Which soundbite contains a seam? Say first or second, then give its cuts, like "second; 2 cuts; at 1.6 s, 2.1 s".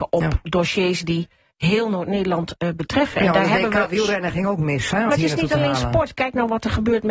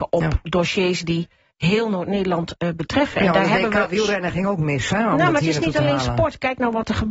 first; 1 cut; at 5.1 s